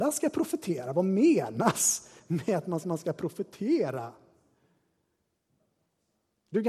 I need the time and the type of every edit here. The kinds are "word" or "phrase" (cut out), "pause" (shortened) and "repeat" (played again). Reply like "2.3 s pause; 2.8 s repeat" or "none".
2.8 s repeat